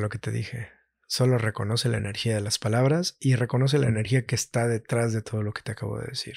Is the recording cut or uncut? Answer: uncut